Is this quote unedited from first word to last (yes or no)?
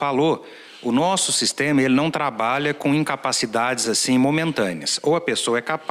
yes